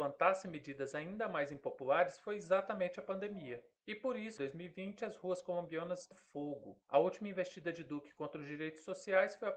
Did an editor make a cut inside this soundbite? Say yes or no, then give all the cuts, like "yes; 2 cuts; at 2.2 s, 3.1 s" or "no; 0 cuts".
yes; 4 cuts; at 3.8 s, 4.4 s, 6.1 s, 6.8 s